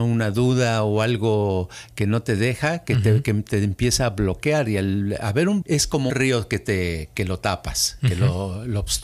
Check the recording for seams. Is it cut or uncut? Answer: cut